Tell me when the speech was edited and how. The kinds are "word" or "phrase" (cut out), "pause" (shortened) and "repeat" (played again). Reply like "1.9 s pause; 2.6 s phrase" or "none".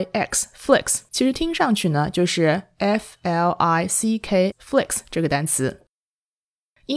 1.1 s pause; 4.5 s word